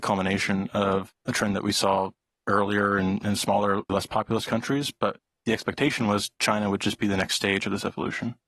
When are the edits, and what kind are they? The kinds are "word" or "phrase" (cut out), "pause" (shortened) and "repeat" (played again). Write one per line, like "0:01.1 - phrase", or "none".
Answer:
0:01.2 - pause
0:03.9 - word